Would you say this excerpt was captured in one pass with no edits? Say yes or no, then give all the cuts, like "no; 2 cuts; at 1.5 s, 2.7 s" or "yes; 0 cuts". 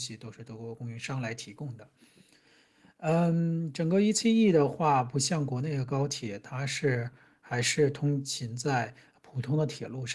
yes; 0 cuts